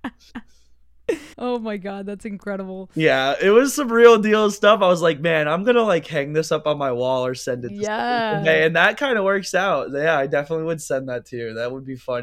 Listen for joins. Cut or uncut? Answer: cut